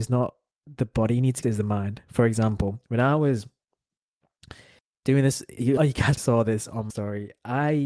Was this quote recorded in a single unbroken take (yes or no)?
no